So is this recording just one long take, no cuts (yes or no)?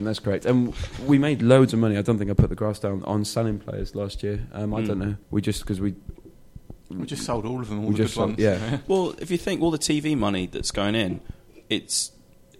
no